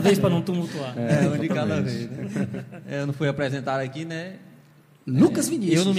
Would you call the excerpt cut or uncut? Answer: uncut